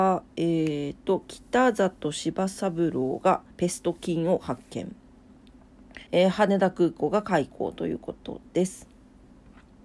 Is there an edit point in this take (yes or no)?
yes